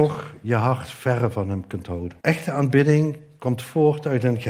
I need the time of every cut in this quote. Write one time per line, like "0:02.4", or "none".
0:02.2